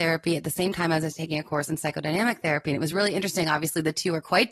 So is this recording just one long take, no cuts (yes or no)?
yes